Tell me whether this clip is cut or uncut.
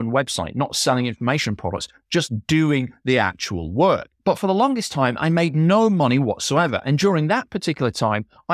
uncut